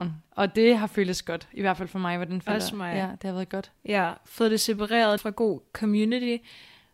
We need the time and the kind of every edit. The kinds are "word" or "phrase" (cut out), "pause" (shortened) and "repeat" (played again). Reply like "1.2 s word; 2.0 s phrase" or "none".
3.8 s pause; 5.2 s word